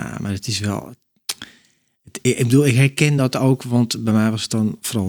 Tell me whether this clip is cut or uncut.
uncut